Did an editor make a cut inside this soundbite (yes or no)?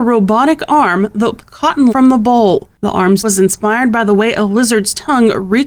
yes